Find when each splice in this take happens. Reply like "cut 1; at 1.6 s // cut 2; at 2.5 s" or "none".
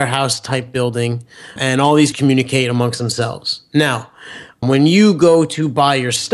cut 1; at 1.6 s // cut 2; at 2.1 s // cut 3; at 4.6 s